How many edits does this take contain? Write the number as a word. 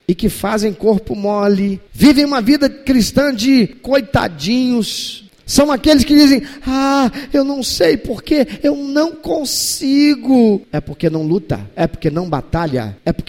zero